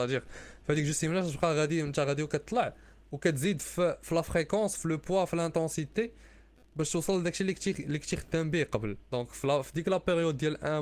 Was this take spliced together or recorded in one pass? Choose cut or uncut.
cut